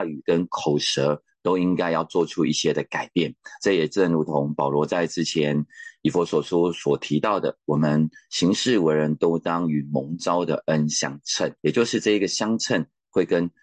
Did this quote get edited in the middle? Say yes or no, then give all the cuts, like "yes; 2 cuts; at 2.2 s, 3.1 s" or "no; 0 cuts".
yes; 1 cut; at 11.6 s